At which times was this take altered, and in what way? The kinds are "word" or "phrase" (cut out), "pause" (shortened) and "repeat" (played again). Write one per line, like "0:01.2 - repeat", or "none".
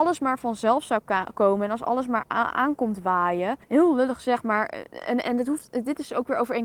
0:03.6 - pause
0:05.2 - phrase